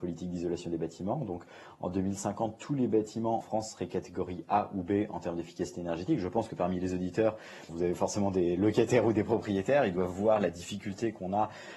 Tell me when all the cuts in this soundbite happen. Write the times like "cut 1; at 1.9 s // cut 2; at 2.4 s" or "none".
cut 1; at 3.4 s // cut 2; at 7.7 s